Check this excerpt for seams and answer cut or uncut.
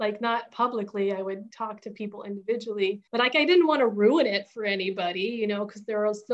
cut